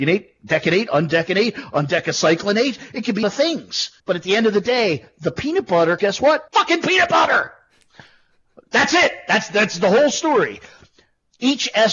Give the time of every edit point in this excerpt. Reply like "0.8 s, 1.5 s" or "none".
3.2 s, 4.0 s, 6.0 s, 6.5 s